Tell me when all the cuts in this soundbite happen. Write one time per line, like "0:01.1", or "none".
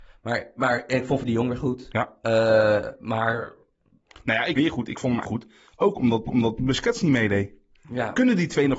0:01.2
0:04.5
0:05.2
0:06.3